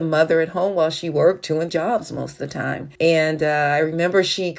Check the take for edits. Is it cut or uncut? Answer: cut